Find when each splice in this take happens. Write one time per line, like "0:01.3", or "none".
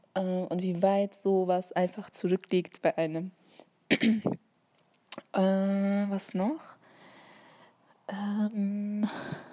none